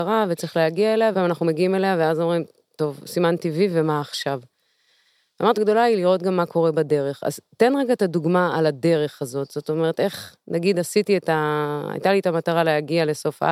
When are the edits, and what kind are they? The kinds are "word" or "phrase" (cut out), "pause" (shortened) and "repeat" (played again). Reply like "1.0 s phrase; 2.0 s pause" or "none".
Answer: 1.1 s word; 5.6 s word